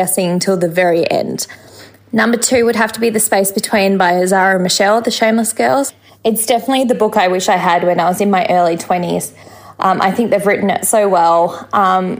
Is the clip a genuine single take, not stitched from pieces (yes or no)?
yes